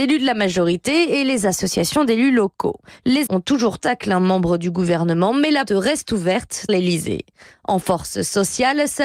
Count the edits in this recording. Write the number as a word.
four